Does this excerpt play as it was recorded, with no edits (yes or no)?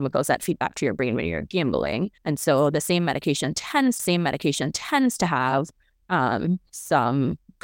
no